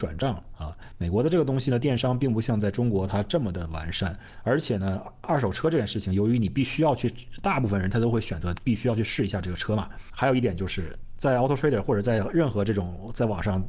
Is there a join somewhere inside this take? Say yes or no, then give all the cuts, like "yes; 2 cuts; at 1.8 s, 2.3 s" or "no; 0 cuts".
no; 0 cuts